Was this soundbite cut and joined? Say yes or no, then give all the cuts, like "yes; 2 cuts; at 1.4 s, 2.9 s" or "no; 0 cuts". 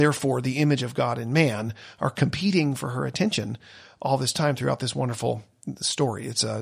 no; 0 cuts